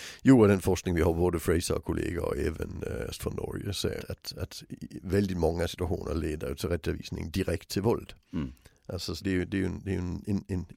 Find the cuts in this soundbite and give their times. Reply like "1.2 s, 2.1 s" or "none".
3.2 s, 4.0 s, 9.2 s